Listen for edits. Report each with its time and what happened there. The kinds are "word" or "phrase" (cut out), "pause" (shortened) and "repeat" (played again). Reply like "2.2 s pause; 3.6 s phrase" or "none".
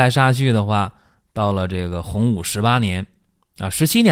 none